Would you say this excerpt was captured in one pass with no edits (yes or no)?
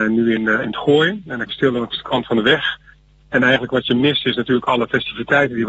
no